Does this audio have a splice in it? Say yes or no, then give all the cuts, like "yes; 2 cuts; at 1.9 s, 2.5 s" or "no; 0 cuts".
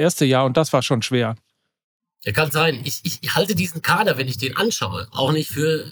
no; 0 cuts